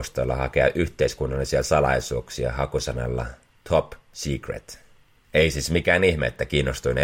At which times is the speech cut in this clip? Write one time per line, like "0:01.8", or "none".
none